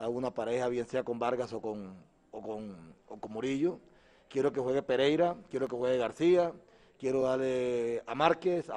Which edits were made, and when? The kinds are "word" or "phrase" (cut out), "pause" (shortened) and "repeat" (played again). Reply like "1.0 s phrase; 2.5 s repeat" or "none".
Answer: none

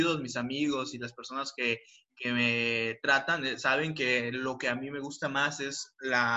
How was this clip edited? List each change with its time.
none

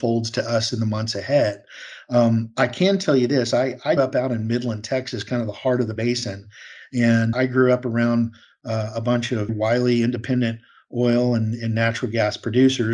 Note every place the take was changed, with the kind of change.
4.0 s word; 6.0 s word; 7.3 s word; 9.5 s word

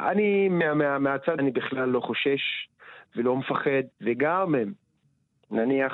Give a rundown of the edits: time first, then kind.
1.4 s word; 3.9 s pause

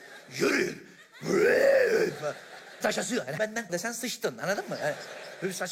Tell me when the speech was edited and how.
2.8 s word; 3.4 s word; 3.7 s word

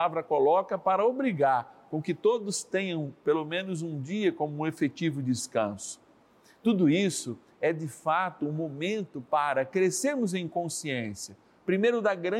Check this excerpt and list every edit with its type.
none

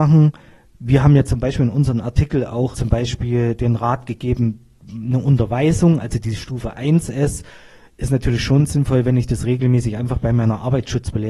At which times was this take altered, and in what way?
2.7 s word

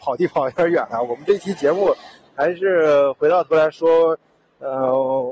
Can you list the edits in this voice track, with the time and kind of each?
none

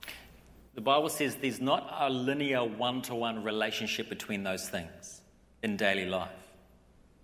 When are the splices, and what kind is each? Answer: none

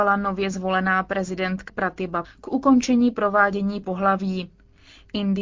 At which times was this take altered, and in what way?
1.7 s word; 2.2 s word; 3.8 s phrase

